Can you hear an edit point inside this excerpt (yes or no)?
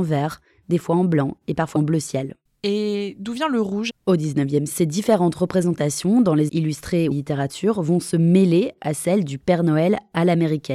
yes